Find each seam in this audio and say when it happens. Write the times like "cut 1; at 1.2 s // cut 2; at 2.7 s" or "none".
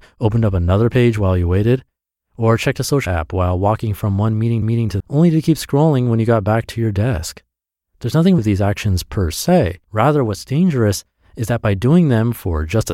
cut 1; at 3.1 s // cut 2; at 4.6 s // cut 3; at 5.0 s // cut 4; at 8.4 s // cut 5; at 9.8 s